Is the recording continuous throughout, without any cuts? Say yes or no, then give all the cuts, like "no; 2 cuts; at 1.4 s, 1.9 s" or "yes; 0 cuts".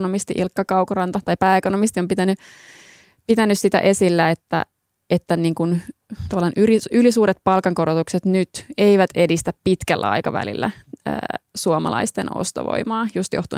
yes; 0 cuts